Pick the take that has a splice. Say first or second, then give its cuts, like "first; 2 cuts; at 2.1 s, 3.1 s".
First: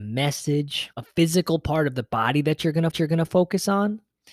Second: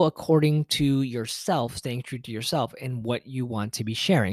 first; 2 cuts; at 0.9 s, 2.9 s